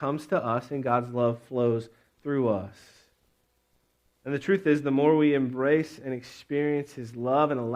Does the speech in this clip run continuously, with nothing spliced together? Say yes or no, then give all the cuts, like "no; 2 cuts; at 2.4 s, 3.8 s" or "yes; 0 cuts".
yes; 0 cuts